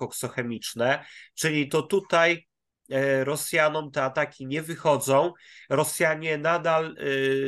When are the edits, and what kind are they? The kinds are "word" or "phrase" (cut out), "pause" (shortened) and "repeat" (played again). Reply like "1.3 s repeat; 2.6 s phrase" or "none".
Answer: 1.7 s phrase